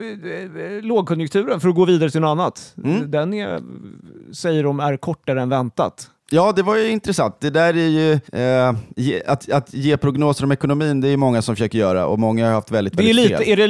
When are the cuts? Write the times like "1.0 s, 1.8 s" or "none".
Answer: 8.3 s